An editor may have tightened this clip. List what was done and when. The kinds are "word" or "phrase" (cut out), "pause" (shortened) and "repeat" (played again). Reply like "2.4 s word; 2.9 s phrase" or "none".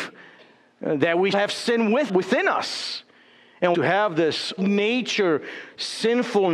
1.3 s word; 2.1 s word; 3.7 s phrase; 4.6 s word